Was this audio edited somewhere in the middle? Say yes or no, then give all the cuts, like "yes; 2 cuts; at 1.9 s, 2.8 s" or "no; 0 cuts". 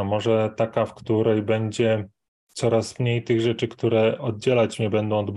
no; 0 cuts